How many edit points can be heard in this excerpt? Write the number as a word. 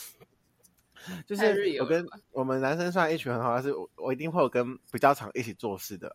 two